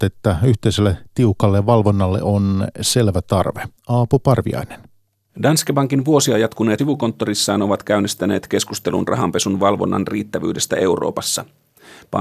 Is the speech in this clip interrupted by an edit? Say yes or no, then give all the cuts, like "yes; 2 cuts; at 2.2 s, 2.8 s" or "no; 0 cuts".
yes; 2 cuts; at 3.8 s, 6.8 s